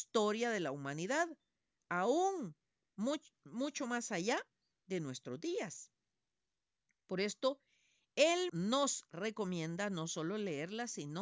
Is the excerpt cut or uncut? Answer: cut